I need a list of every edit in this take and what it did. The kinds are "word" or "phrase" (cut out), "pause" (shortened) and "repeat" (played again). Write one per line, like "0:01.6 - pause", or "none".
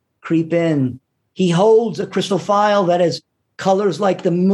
none